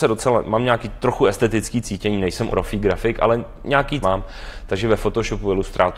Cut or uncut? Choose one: cut